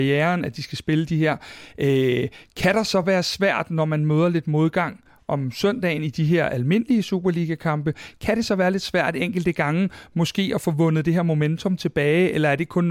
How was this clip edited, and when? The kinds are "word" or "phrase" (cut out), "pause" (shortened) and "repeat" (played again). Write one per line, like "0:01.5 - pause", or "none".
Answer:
none